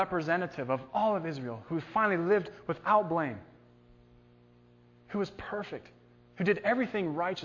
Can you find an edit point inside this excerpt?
no; 0 cuts

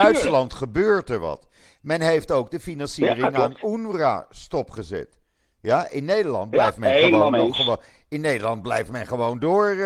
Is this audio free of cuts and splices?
yes; 0 cuts

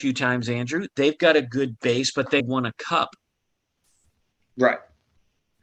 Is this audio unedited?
no; 1 cut; at 2.4 s

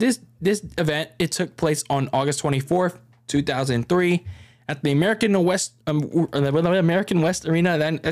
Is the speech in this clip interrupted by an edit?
yes; 1 cut; at 5.8 s

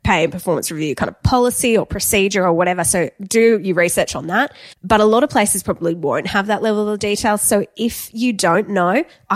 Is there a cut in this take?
yes; 1 cut; at 4.7 s

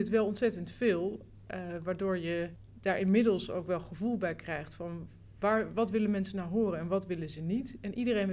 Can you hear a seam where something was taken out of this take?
no; 0 cuts

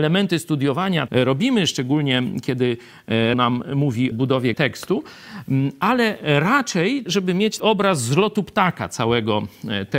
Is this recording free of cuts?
no; 6 cuts; at 1.1 s, 3.3 s, 4.1 s, 4.5 s, 7.1 s, 7.6 s

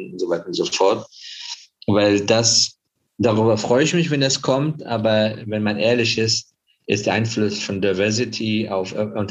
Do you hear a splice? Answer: no; 0 cuts

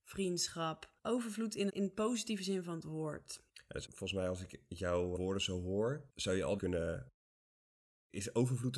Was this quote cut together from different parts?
yes; 7 cuts; at 1.0 s, 1.7 s, 3.5 s, 3.9 s, 5.1 s, 6.1 s, 6.6 s

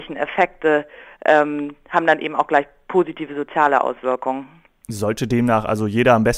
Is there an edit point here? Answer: no; 0 cuts

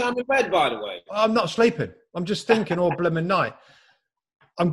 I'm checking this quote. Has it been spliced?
no; 0 cuts

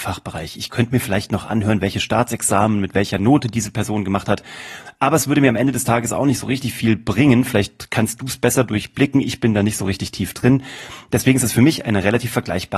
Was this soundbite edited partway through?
no; 0 cuts

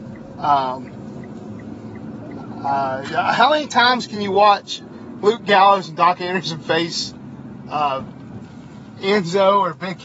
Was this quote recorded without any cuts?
yes; 0 cuts

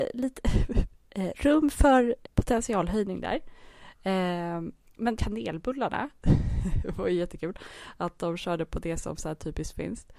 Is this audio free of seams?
no; 2 cuts; at 2.2 s, 5.2 s

